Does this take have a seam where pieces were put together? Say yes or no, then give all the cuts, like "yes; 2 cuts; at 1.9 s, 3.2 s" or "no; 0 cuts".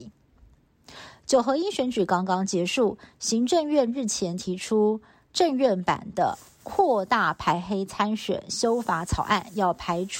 no; 0 cuts